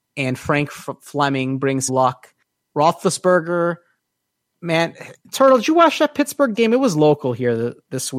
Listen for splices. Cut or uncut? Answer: cut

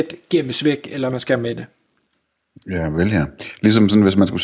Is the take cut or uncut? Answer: cut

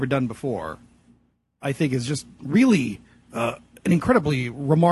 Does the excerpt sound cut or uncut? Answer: uncut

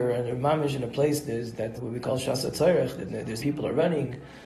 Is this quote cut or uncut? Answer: cut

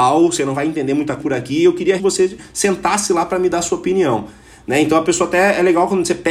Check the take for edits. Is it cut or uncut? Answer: cut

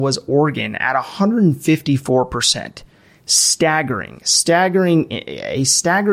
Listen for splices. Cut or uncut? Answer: uncut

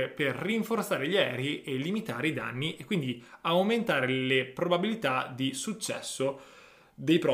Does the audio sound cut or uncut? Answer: uncut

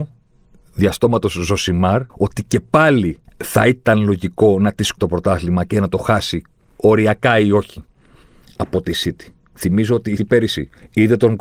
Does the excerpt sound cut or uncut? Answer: cut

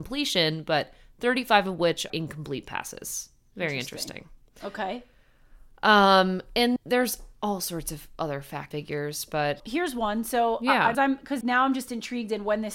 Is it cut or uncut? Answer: cut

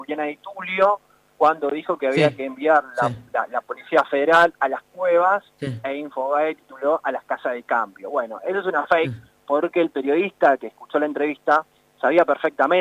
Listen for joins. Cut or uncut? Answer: uncut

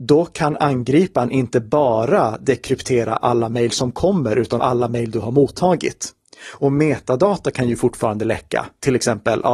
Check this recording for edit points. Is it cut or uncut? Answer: cut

